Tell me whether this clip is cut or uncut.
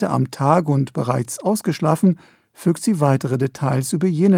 uncut